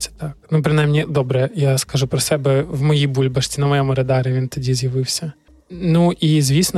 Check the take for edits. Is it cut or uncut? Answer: uncut